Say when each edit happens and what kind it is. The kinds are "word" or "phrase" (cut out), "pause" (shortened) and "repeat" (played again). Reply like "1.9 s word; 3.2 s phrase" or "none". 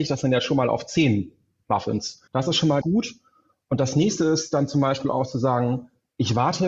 2.3 s pause; 2.8 s word